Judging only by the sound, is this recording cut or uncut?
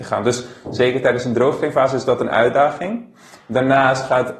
uncut